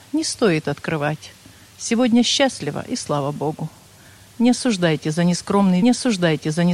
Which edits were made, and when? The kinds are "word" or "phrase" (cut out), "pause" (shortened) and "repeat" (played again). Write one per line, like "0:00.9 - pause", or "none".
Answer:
0:05.8 - repeat